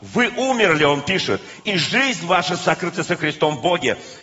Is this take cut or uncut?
uncut